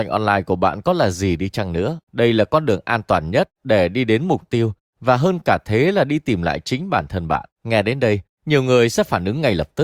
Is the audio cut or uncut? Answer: cut